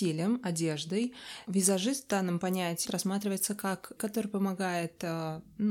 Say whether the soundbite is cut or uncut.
cut